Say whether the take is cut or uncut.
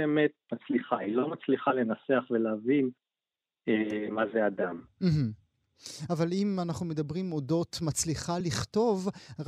uncut